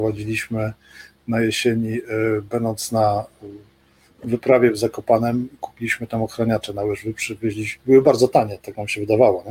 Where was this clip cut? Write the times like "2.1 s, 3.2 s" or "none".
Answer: none